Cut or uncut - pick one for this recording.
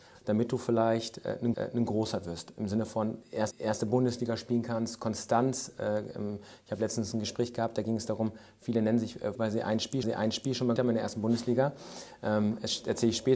cut